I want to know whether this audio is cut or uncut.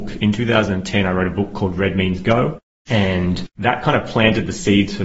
cut